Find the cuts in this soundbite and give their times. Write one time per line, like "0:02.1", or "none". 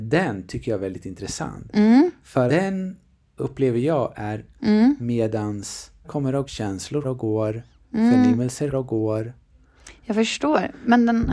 0:02.5
0:04.6
0:06.0
0:06.5
0:07.0
0:08.7